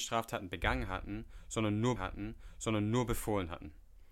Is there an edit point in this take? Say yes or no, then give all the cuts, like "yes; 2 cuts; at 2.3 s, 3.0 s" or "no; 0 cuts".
yes; 1 cut; at 2.0 s